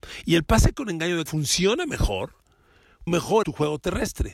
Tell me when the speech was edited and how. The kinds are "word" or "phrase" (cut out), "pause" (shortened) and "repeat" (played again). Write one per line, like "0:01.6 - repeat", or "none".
0:01.3 - word
0:03.1 - word
0:03.4 - word